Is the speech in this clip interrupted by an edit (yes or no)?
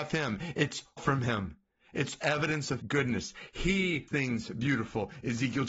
yes